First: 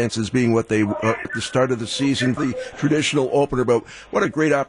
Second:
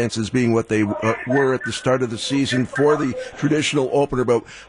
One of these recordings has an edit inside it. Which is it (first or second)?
first